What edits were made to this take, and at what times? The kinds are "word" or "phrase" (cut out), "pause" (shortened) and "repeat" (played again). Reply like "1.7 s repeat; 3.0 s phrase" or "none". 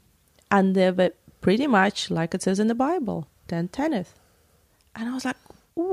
3.3 s pause